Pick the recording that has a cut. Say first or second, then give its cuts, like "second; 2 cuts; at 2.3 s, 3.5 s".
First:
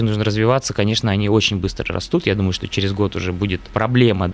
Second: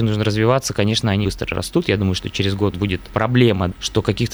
second; 2 cuts; at 1.2 s, 2.7 s